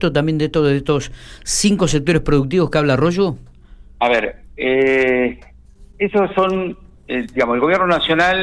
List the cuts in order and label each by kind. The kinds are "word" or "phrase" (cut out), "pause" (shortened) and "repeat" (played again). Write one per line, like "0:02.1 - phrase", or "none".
none